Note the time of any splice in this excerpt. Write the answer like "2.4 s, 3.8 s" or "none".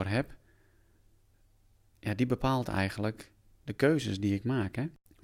none